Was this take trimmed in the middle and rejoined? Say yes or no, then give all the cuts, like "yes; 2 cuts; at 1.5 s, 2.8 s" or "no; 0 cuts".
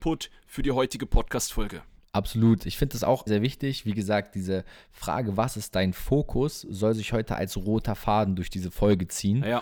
yes; 1 cut; at 3.3 s